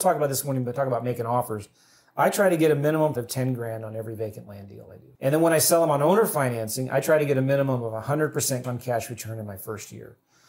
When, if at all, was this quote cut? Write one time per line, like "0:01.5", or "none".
0:03.2
0:05.1
0:08.6